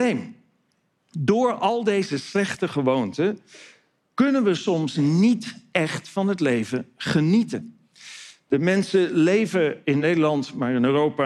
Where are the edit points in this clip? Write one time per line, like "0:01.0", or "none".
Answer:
none